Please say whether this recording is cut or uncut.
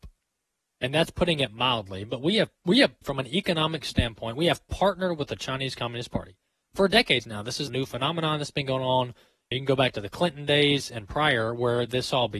cut